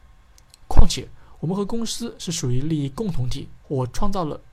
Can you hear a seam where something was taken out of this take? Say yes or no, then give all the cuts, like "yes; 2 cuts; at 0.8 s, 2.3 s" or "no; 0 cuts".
yes; 1 cut; at 3.6 s